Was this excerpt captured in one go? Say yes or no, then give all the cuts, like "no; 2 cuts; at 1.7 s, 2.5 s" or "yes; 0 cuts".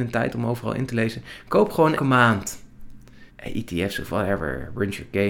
no; 2 cuts; at 2.0 s, 3.3 s